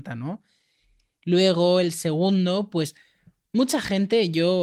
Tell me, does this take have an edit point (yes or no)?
no